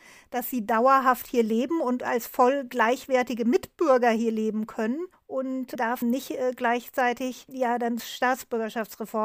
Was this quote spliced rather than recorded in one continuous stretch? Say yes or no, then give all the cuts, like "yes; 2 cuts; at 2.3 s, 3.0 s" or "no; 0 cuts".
yes; 3 cuts; at 5.1 s, 6.0 s, 8.0 s